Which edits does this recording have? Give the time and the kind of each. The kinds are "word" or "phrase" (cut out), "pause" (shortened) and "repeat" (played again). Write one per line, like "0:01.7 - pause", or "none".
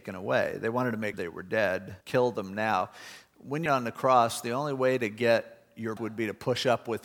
0:01.1 - word
0:02.0 - pause
0:03.7 - phrase
0:06.0 - word